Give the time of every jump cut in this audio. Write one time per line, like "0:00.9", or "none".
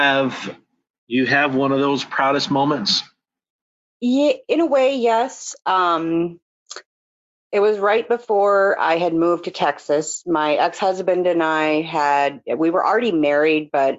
none